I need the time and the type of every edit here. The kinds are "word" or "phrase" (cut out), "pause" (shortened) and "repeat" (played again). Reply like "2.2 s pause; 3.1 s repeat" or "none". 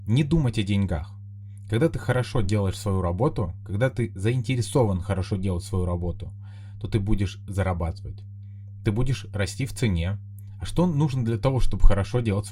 none